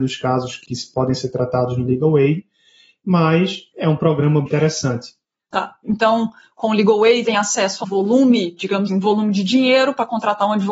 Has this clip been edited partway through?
yes; 4 cuts; at 4.5 s, 7.2 s, 7.8 s, 8.9 s

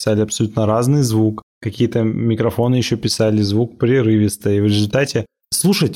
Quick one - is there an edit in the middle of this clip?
yes; 1 cut; at 1.5 s

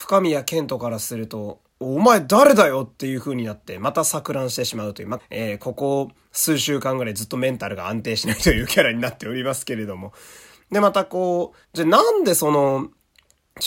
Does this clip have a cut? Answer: yes; 3 cuts; at 1.7 s, 5.2 s, 11.6 s

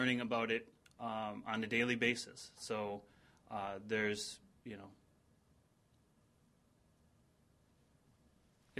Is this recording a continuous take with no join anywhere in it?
yes; 0 cuts

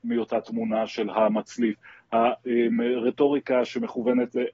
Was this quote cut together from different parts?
yes; 1 cut; at 1.1 s

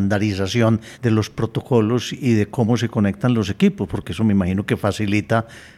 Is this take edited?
yes; 1 cut; at 0.9 s

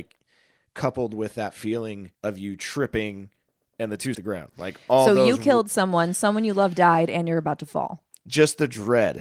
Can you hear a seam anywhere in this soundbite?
yes; 2 cuts; at 2.1 s, 4.1 s

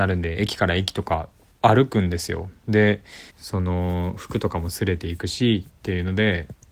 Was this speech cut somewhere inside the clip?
yes; 2 cuts; at 1.5 s, 3.3 s

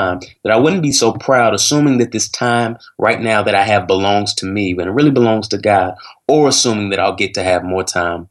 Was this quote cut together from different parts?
no; 0 cuts

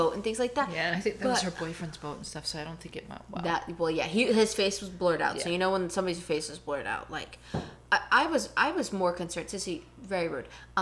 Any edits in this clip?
no; 0 cuts

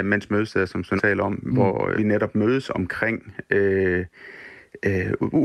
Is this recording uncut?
no; 2 cuts; at 1.0 s, 2.0 s

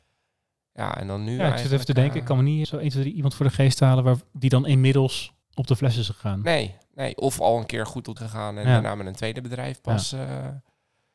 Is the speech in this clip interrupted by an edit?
yes; 3 cuts; at 2.6 s, 5.4 s, 8.2 s

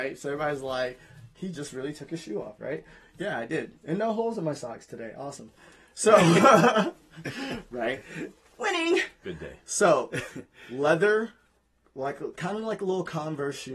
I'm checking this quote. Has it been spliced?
no; 0 cuts

